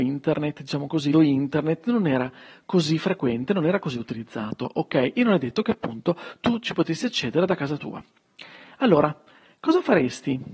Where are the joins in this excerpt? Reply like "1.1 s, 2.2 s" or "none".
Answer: 1.1 s